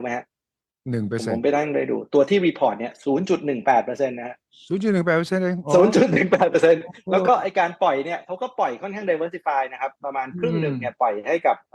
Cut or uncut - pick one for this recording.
uncut